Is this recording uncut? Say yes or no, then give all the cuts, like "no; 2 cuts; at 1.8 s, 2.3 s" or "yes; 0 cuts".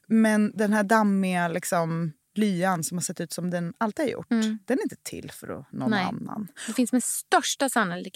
yes; 0 cuts